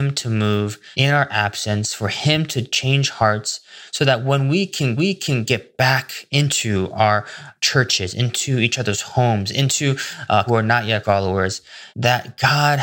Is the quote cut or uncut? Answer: cut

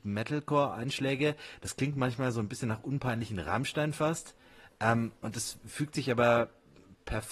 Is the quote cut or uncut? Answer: uncut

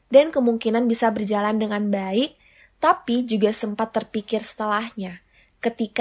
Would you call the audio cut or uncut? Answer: uncut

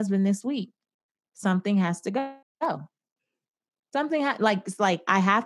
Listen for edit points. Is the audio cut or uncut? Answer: cut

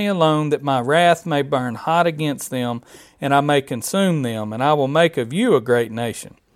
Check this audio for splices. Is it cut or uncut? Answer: uncut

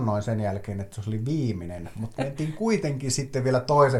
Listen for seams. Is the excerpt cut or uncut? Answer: uncut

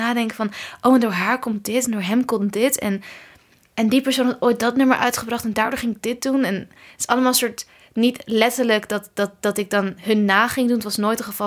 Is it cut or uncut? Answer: uncut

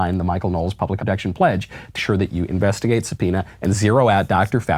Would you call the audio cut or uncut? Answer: cut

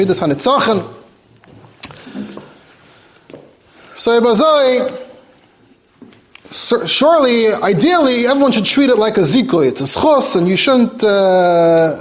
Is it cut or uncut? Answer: uncut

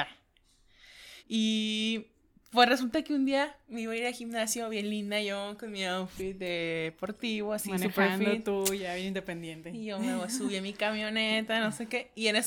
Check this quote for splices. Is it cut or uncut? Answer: cut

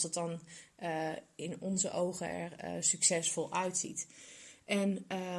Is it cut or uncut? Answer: uncut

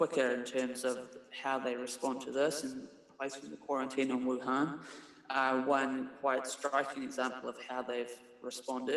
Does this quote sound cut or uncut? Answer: uncut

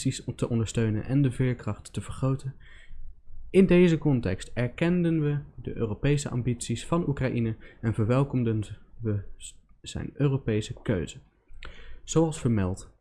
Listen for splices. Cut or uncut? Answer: uncut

